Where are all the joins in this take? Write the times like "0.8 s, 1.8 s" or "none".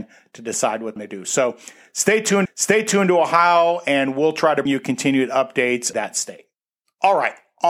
1.0 s, 2.5 s, 4.7 s, 5.9 s